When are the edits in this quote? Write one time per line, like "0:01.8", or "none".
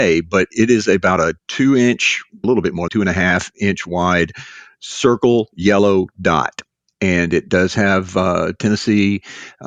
0:01.4
0:02.4
0:02.9